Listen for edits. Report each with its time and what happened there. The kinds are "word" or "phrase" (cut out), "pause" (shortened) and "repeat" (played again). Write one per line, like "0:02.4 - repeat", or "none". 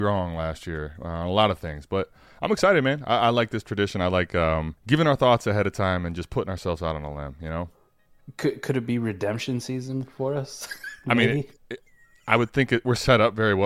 0:04.8 - pause